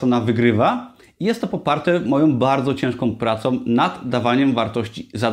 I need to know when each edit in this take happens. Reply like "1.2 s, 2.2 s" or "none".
none